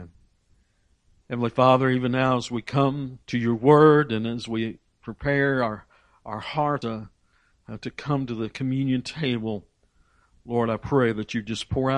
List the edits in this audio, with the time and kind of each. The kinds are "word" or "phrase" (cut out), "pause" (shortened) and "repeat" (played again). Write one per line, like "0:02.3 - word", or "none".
0:03.2 - pause
0:06.8 - phrase